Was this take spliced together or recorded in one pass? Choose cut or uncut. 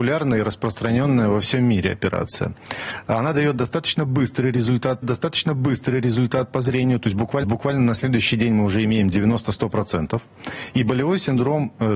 cut